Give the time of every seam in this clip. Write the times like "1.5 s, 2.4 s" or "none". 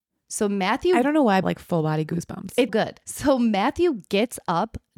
1.4 s, 2.7 s, 3.0 s